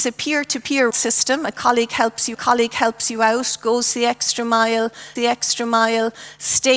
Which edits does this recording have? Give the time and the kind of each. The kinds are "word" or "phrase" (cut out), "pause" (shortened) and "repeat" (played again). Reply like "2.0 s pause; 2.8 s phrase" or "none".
0.9 s word; 2.3 s repeat; 5.2 s repeat